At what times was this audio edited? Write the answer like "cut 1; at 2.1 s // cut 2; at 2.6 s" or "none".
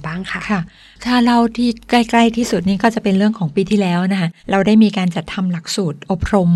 cut 1; at 4.4 s